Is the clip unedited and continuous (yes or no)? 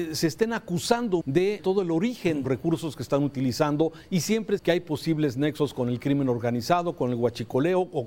no